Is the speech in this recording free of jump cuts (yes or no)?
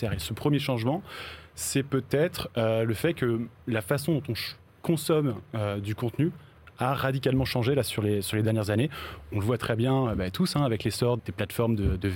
no